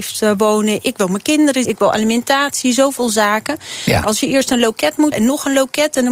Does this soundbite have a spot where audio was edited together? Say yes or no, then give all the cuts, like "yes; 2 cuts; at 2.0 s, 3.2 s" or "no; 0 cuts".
yes; 3 cuts; at 1.6 s, 4.0 s, 5.1 s